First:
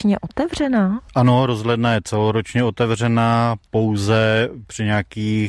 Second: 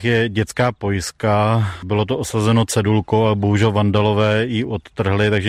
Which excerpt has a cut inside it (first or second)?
first